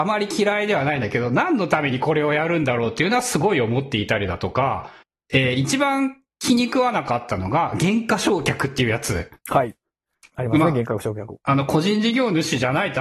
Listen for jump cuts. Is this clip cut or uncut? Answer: cut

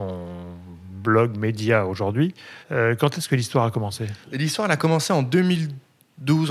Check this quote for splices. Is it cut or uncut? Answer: cut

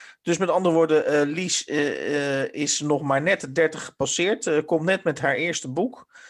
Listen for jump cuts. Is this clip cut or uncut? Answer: uncut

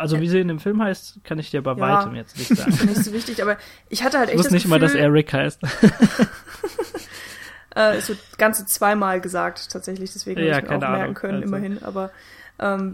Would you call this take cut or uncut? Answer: uncut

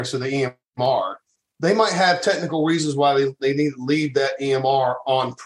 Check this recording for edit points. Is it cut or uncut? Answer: uncut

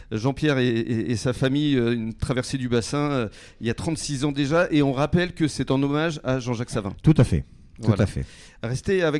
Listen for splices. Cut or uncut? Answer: uncut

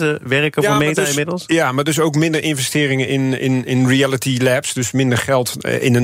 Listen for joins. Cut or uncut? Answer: uncut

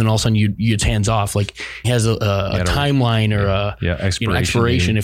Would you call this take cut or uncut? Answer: cut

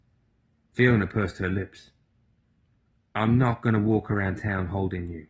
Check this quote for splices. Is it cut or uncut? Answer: uncut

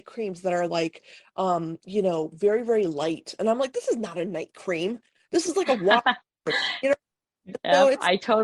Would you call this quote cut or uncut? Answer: uncut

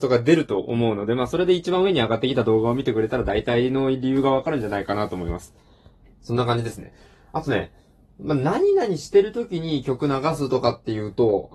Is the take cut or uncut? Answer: uncut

